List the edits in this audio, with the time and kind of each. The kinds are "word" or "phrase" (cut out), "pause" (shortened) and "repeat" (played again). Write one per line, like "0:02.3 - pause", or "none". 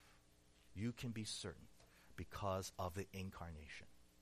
none